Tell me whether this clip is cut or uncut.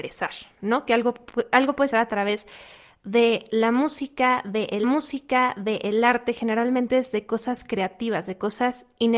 cut